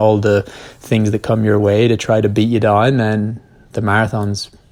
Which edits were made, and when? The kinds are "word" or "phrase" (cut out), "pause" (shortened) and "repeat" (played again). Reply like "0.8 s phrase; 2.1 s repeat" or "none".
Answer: none